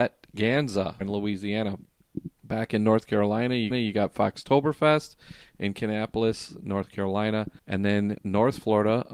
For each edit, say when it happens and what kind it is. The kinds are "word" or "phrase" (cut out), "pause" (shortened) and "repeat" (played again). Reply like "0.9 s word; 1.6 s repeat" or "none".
1.0 s phrase; 2.4 s pause; 3.7 s repeat; 7.6 s pause; 8.2 s word